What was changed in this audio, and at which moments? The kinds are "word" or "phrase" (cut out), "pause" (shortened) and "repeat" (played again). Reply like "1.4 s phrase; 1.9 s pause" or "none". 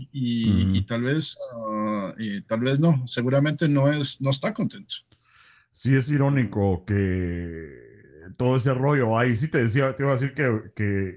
none